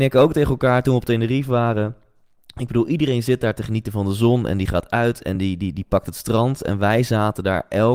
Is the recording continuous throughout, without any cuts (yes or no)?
yes